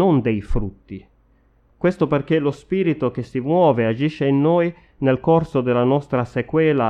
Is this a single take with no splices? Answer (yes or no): yes